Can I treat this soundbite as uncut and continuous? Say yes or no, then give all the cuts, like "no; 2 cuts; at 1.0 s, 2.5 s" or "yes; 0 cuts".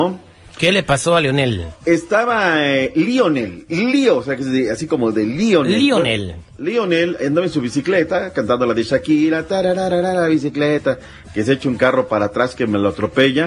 yes; 0 cuts